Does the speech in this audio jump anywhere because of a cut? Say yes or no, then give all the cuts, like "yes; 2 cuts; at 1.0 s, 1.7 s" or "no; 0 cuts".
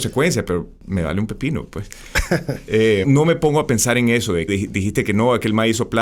yes; 2 cuts; at 3.0 s, 4.5 s